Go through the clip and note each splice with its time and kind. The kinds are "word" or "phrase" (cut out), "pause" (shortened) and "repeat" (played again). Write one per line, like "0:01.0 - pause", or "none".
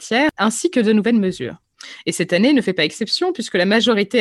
none